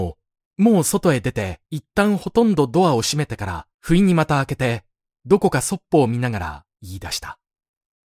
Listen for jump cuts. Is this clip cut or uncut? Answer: cut